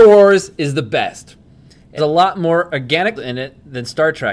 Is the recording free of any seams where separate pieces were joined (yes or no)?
no